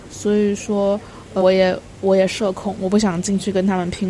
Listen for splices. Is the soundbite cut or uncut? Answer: cut